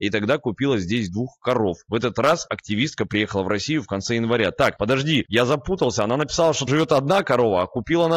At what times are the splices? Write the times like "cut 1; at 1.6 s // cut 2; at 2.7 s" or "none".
cut 1; at 6.7 s

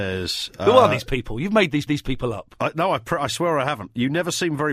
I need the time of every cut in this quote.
cut 1; at 1.9 s

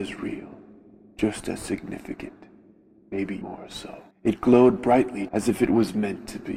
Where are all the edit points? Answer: cut 1; at 3.4 s // cut 2; at 4.1 s // cut 3; at 5.3 s

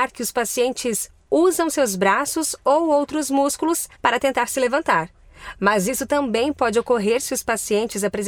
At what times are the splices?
cut 1; at 3.9 s

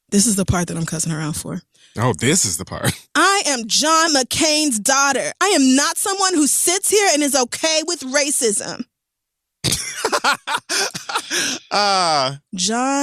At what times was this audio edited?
none

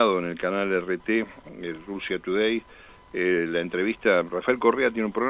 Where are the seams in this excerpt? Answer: none

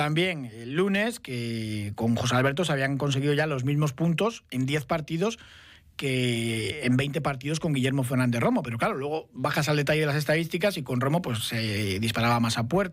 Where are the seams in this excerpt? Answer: none

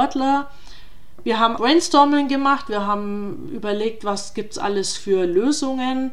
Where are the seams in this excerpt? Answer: cut 1; at 1.6 s

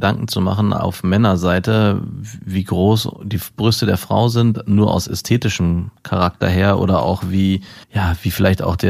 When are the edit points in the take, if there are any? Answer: cut 1; at 6.0 s // cut 2; at 7.8 s

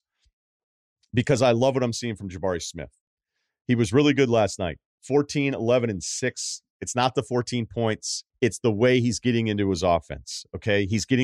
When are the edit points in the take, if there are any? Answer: cut 1; at 8.3 s

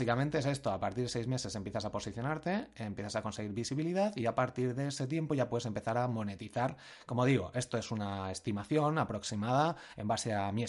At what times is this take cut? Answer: none

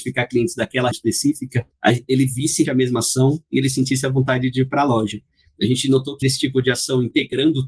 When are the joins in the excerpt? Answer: cut 1; at 0.9 s // cut 2; at 2.6 s // cut 3; at 6.2 s

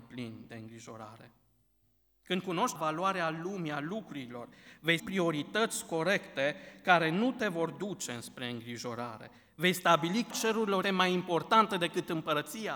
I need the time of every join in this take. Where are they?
cut 1; at 2.8 s // cut 2; at 5.0 s // cut 3; at 10.3 s // cut 4; at 10.8 s

